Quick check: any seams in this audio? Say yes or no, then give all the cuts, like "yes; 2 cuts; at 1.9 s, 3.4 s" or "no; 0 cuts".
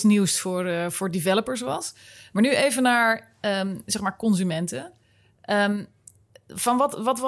no; 0 cuts